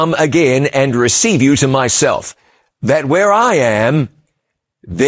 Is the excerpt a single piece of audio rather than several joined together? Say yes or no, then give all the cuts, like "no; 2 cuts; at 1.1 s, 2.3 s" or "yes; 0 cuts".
yes; 0 cuts